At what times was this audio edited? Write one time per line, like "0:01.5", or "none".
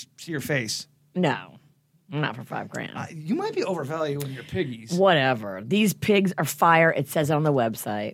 none